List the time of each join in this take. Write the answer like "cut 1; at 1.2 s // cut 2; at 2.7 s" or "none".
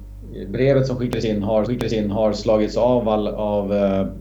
cut 1; at 1.7 s

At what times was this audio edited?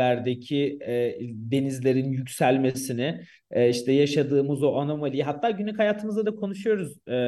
none

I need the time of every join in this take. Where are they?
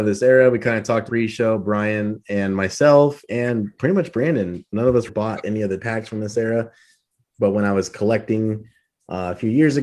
cut 1; at 1.1 s // cut 2; at 5.1 s // cut 3; at 5.8 s

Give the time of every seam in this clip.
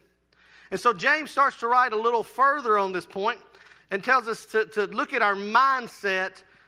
none

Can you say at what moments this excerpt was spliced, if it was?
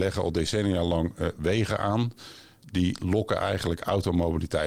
none

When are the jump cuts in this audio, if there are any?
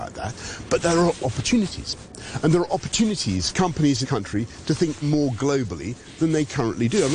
cut 1; at 1.2 s // cut 2; at 3.5 s // cut 3; at 4.0 s // cut 4; at 5.0 s

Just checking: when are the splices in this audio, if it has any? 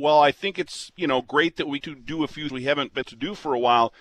cut 1; at 1.8 s // cut 2; at 2.5 s // cut 3; at 3.0 s

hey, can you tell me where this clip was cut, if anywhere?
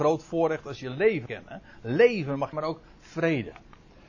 cut 1; at 1.3 s // cut 2; at 2.5 s

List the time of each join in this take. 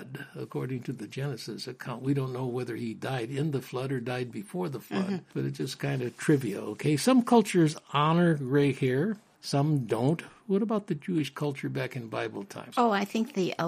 none

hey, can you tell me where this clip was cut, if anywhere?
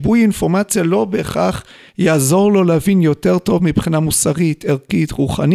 none

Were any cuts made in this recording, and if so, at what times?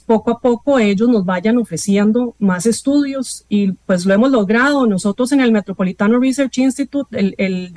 none

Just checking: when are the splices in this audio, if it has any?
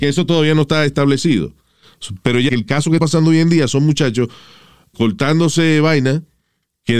cut 1; at 2.5 s // cut 2; at 3.0 s // cut 3; at 4.9 s

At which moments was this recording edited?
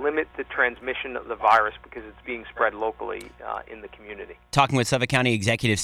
none

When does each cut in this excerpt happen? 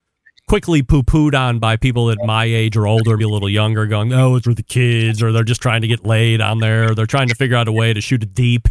cut 1; at 3.2 s // cut 2; at 4.4 s

